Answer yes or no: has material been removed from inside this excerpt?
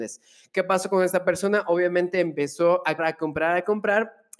yes